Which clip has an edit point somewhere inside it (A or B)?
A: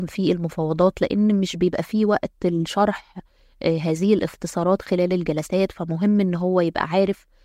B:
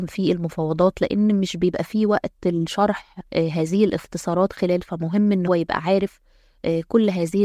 B